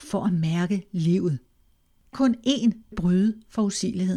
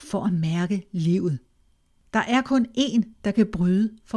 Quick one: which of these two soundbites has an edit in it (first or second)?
first